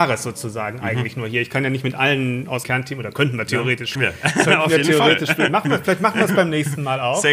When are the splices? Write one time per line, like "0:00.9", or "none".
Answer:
0:02.6
0:03.9